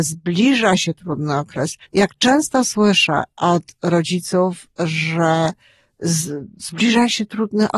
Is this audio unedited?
no; 1 cut; at 1.8 s

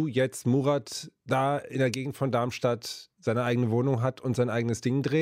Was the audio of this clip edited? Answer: no; 0 cuts

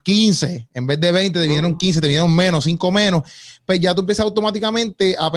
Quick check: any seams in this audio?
no; 0 cuts

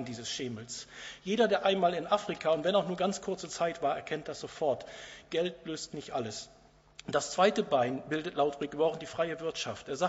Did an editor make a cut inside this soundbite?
no; 0 cuts

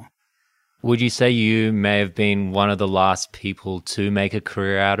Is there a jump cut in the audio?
no; 0 cuts

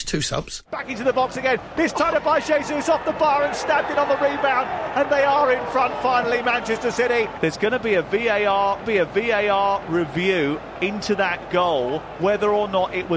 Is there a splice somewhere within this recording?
yes; 4 cuts; at 2.1 s, 5.1 s, 8.8 s, 12.2 s

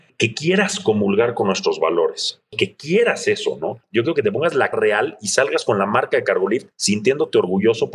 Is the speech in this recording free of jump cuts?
no; 2 cuts; at 4.7 s, 6.7 s

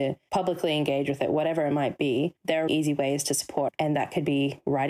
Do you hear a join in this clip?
yes; 2 cuts; at 2.4 s, 2.7 s

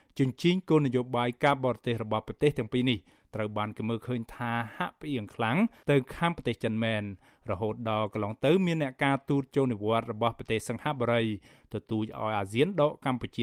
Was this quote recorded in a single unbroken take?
yes; 0 cuts

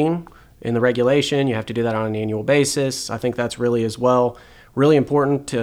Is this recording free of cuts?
yes; 0 cuts

